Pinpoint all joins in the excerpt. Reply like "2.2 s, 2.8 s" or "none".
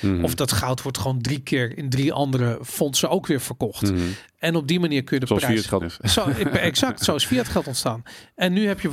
5.8 s